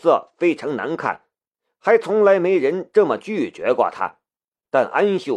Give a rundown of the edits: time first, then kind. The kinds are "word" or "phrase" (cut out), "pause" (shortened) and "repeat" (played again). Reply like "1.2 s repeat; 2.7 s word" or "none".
none